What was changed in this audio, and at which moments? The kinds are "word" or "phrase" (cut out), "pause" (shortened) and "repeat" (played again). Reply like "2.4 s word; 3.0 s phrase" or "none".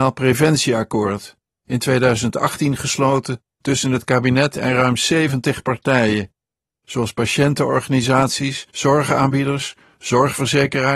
8.7 s pause